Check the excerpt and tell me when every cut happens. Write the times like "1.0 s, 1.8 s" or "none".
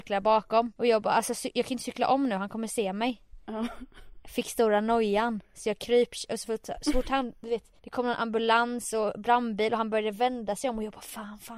7.8 s